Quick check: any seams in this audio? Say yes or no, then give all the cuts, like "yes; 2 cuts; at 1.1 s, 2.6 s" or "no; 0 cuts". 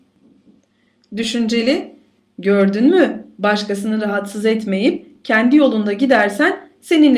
no; 0 cuts